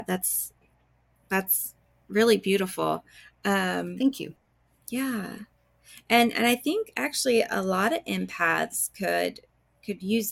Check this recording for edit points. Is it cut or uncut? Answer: uncut